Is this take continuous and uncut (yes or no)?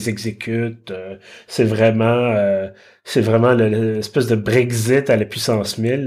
yes